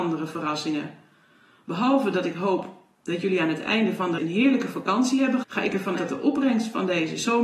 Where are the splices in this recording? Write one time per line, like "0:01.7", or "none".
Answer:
0:04.2
0:05.4
0:06.0